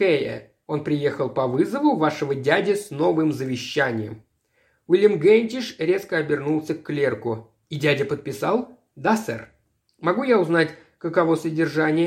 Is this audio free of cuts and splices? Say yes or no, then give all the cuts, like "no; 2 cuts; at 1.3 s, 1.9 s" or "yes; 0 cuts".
yes; 0 cuts